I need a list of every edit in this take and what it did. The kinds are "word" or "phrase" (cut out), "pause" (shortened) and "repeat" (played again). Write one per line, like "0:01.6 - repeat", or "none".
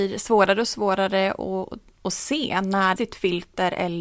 0:03.0 - word